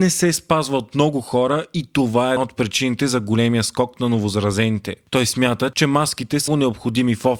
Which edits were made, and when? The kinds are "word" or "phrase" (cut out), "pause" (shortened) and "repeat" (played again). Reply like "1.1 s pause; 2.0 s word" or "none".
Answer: 2.4 s word; 6.5 s word